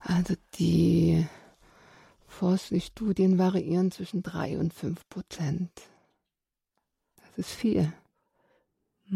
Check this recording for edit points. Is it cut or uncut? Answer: uncut